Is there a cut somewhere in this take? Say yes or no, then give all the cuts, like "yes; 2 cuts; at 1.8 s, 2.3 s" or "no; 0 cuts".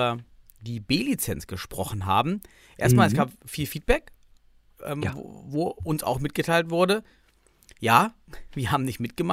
no; 0 cuts